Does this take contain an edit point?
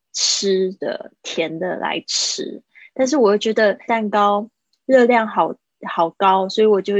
yes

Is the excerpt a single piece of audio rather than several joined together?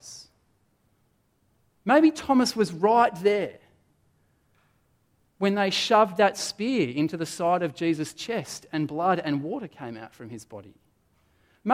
yes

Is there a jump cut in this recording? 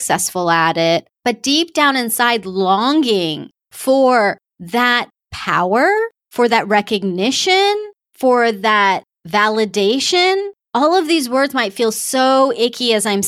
yes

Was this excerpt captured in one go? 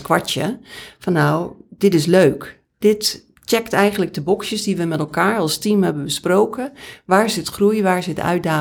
no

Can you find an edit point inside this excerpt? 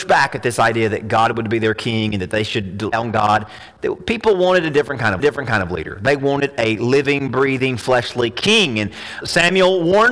yes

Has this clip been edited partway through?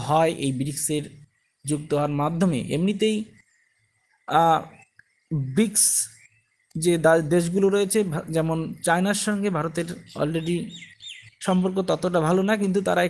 no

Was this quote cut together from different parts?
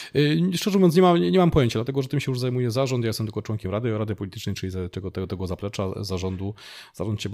no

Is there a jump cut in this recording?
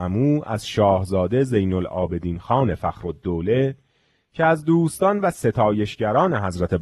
no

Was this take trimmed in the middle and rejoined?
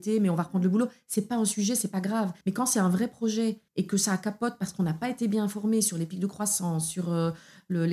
yes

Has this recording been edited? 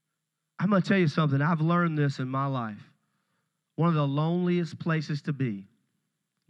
no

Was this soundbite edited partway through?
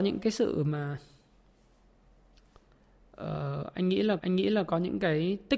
yes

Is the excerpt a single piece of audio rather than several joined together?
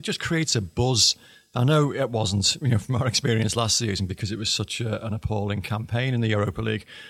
yes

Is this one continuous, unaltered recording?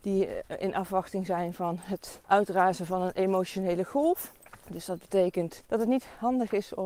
yes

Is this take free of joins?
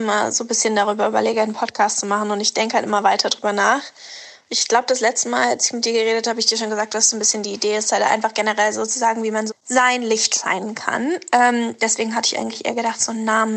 no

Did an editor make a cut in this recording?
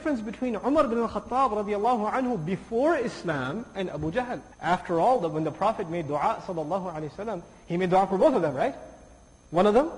yes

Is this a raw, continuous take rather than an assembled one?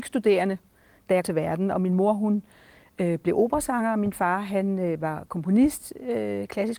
no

